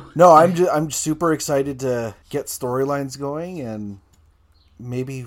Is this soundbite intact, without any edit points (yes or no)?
no